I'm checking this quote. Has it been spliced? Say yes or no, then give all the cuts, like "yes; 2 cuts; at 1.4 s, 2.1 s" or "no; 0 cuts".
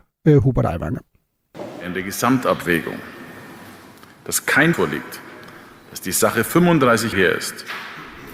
yes; 2 cuts; at 4.7 s, 7.1 s